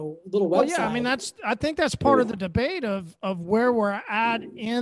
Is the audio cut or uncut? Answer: uncut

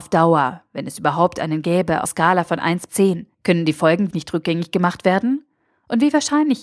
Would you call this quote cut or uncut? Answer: cut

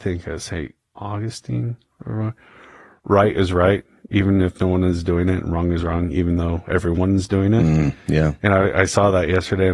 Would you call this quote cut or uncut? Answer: uncut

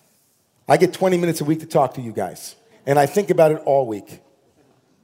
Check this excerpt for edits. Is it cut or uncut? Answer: cut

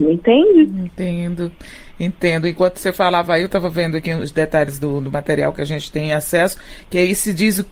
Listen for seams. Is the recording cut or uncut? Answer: uncut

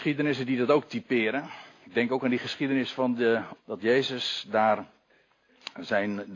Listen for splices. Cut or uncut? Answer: cut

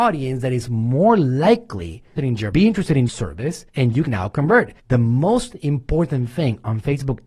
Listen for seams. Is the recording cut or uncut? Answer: cut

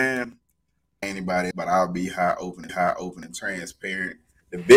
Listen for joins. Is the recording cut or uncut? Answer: cut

